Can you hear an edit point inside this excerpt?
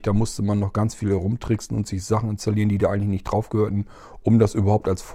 no; 0 cuts

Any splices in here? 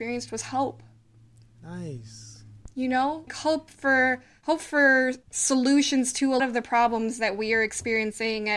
yes; 4 cuts; at 3.3 s, 4.4 s, 5.2 s, 6.4 s

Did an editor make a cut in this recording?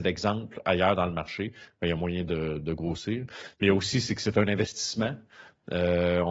no; 0 cuts

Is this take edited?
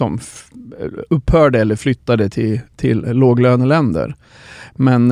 no; 0 cuts

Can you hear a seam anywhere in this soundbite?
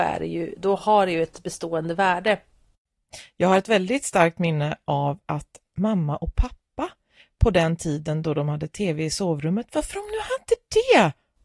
no; 0 cuts

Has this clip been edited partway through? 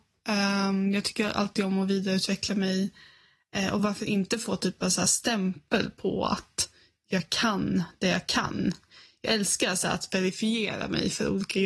no; 0 cuts

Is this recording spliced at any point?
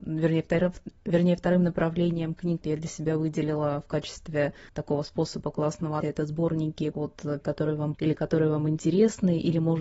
yes; 6 cuts; at 2.6 s, 4.7 s, 6.0 s, 6.9 s, 7.4 s, 7.9 s

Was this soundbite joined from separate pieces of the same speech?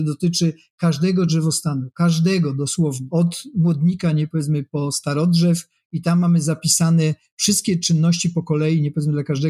no; 0 cuts

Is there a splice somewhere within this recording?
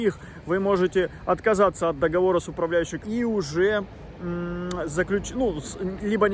yes; 1 cut; at 3.0 s

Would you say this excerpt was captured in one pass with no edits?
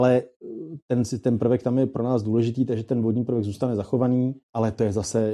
yes; 0 cuts

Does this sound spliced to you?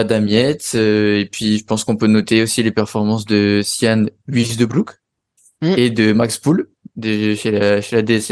no; 0 cuts

